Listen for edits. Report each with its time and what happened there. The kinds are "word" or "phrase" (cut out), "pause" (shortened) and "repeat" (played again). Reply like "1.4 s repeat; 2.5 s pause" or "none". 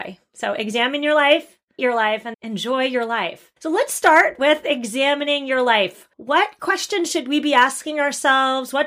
1.8 s word; 2.3 s word; 3.6 s pause; 6.1 s pause